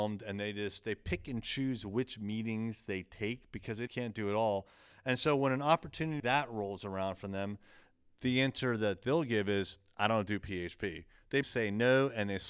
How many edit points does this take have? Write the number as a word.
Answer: three